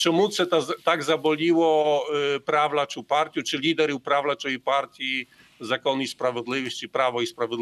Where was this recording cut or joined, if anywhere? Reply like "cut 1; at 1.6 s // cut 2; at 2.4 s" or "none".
none

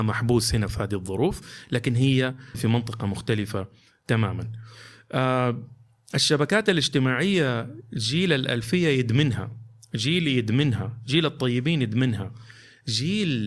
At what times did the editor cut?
cut 1; at 2.5 s

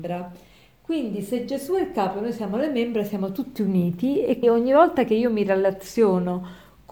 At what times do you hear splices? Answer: cut 1; at 4.4 s

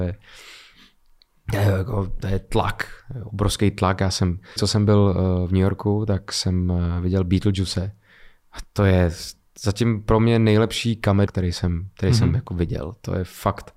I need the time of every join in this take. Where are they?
cut 1; at 4.6 s // cut 2; at 11.3 s

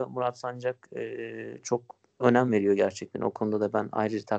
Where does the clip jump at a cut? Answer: none

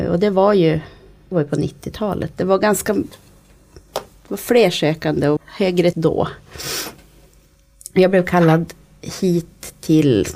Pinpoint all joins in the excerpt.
cut 1; at 1.3 s // cut 2; at 5.4 s // cut 3; at 5.9 s

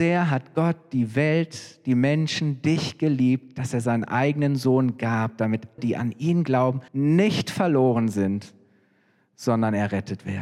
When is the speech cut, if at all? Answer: cut 1; at 5.8 s // cut 2; at 6.9 s

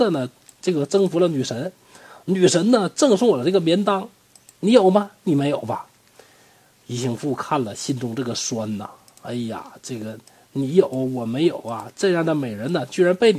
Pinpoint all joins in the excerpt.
none

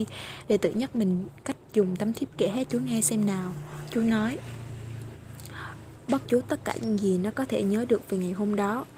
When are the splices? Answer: cut 1; at 2.3 s // cut 2; at 2.7 s // cut 3; at 6.2 s

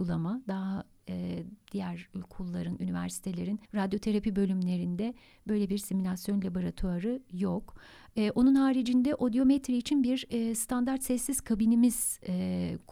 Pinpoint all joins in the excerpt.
cut 1; at 3.6 s

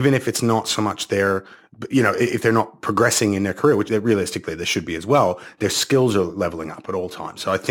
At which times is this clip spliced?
cut 1; at 3.9 s

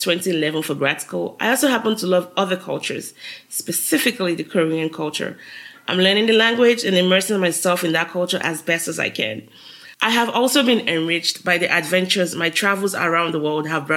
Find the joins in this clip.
cut 1; at 9.9 s

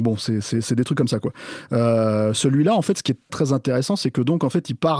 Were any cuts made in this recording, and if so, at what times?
cut 1; at 3.3 s

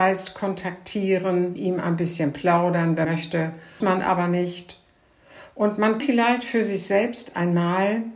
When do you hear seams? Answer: cut 1; at 1.6 s // cut 2; at 3.0 s // cut 3; at 3.8 s // cut 4; at 6.0 s

